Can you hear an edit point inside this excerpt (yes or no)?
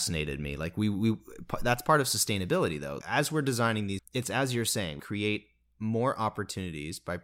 yes